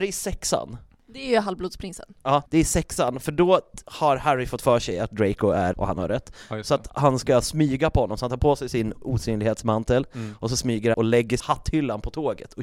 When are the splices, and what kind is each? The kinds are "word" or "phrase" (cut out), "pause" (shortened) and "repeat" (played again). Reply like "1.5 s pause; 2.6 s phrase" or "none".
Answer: 2.4 s pause; 5.7 s word; 10.9 s word; 11.4 s phrase